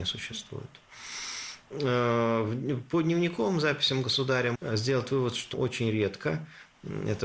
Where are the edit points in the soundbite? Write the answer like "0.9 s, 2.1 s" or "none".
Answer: 4.5 s, 5.5 s